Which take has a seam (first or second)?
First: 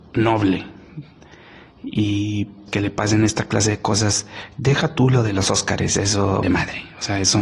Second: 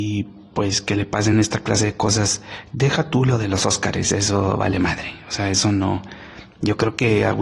first